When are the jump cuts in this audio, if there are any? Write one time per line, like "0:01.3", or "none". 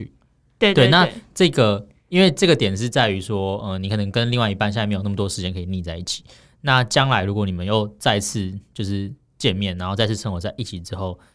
none